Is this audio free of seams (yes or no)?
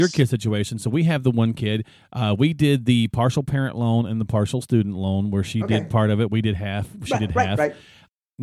yes